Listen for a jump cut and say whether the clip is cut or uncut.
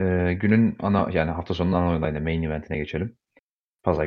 uncut